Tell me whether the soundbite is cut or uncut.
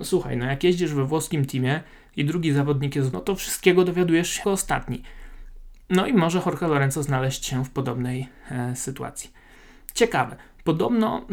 cut